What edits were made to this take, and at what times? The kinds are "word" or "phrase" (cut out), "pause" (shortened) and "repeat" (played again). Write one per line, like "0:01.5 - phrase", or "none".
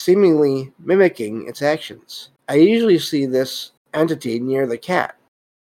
0:02.4 - pause
0:03.8 - pause